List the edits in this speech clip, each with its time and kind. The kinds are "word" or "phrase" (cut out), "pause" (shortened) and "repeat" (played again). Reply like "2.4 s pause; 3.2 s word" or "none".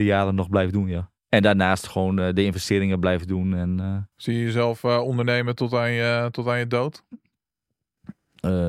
1.2 s pause; 4.1 s pause